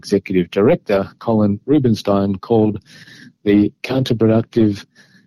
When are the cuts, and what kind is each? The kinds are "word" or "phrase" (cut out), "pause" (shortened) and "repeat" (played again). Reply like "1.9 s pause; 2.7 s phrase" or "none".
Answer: none